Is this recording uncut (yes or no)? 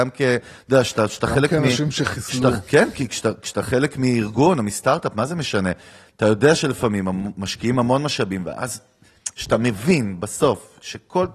yes